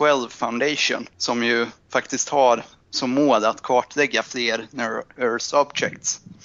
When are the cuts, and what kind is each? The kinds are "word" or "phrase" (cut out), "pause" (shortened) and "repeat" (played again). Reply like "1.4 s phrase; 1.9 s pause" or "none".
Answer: 1.1 s pause; 5.2 s word